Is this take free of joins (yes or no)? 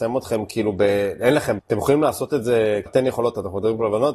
no